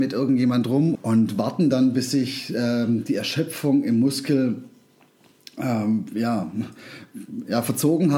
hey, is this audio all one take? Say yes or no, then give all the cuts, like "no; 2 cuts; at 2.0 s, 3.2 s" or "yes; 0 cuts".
no; 1 cut; at 0.9 s